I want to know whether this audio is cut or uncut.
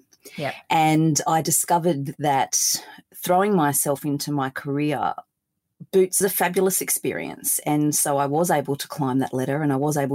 cut